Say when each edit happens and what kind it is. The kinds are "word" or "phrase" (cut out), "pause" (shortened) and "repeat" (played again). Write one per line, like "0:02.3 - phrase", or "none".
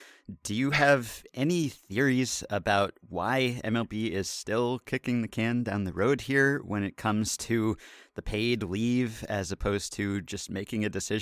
none